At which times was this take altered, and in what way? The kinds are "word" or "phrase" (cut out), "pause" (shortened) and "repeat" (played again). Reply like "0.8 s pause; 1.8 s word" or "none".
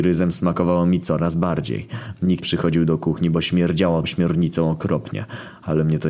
2.4 s word; 4.0 s word